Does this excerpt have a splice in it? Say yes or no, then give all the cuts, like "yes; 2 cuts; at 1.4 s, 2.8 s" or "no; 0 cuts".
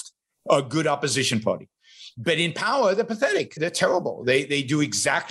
yes; 1 cut; at 3.6 s